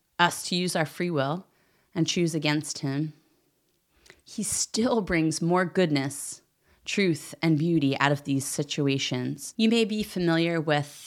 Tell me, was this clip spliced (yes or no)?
no